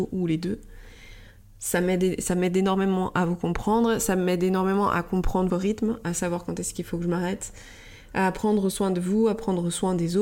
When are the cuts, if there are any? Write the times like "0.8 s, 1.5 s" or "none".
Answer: 5.5 s